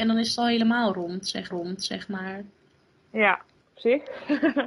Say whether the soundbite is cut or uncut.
cut